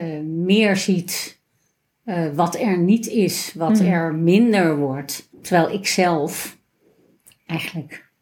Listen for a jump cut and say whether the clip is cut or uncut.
uncut